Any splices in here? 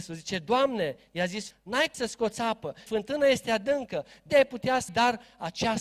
yes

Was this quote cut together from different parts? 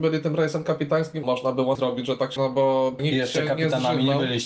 yes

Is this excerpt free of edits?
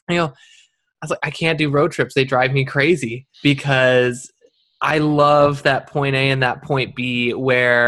no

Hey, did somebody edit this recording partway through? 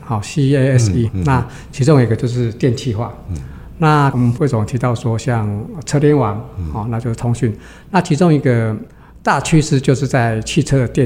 yes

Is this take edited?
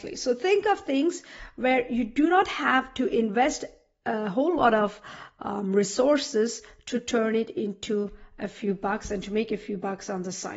no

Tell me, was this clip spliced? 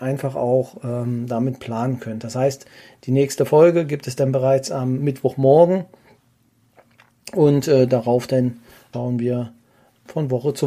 no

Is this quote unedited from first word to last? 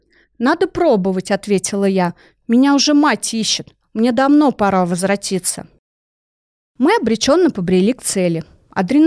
yes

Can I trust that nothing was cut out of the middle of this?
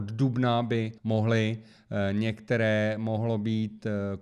no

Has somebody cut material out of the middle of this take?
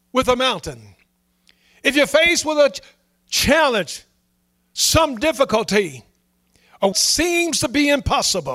yes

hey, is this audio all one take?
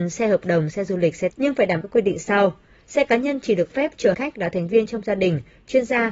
no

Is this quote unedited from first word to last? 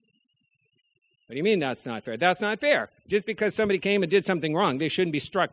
yes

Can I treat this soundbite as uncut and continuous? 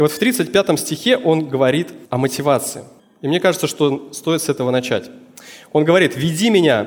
no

